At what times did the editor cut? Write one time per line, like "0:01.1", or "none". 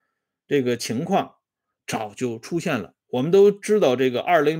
none